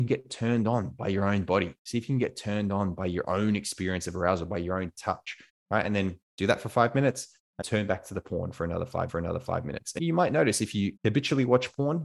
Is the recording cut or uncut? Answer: cut